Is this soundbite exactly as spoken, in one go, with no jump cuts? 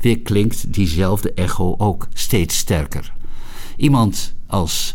yes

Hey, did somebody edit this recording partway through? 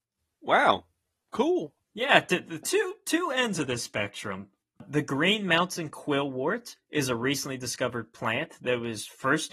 yes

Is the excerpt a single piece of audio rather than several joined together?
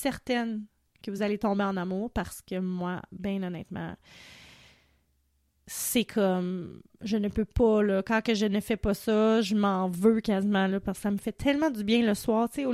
yes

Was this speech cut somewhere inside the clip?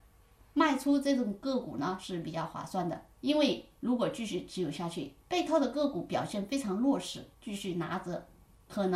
yes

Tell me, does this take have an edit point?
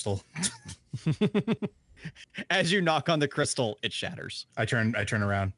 yes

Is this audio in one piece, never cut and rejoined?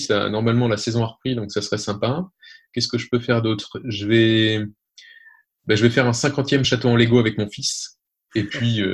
yes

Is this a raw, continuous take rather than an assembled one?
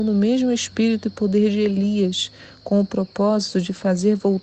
yes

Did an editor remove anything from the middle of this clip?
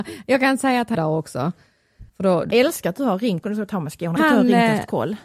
yes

